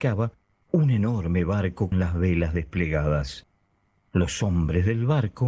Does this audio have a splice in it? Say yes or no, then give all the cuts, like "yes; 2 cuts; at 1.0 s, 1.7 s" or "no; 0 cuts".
yes; 1 cut; at 1.9 s